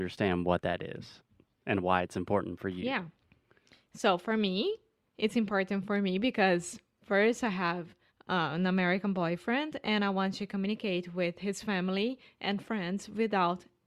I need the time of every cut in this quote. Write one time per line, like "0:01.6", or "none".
0:08.1